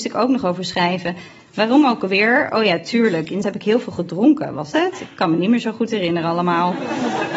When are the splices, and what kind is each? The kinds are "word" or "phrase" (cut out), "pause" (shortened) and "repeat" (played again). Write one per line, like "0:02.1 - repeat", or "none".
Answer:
0:03.4 - word
0:04.7 - word